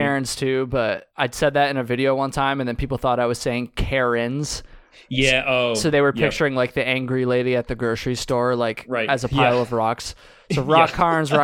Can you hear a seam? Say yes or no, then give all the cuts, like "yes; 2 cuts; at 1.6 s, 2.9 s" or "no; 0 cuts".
yes; 1 cut; at 1.1 s